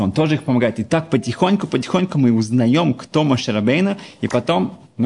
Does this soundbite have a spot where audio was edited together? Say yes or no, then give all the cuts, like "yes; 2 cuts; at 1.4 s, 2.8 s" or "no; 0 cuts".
no; 0 cuts